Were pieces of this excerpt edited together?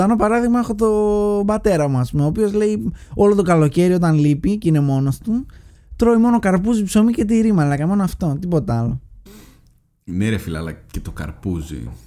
no; 0 cuts

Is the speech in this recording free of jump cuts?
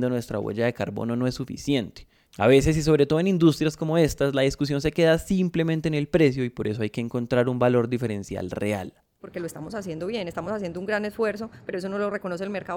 yes; 0 cuts

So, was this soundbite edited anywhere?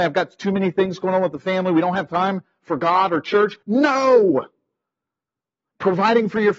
yes; 1 cut; at 3.6 s

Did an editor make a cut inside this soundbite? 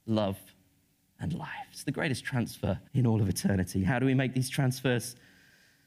yes; 1 cut; at 2.9 s

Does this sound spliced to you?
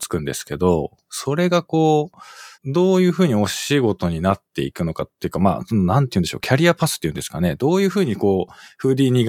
yes; 1 cut; at 2.5 s

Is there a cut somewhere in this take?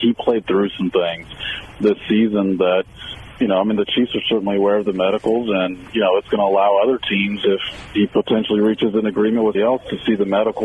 yes; 1 cut; at 9.5 s

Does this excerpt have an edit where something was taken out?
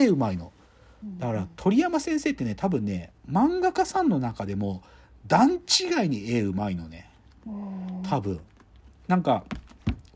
no; 0 cuts

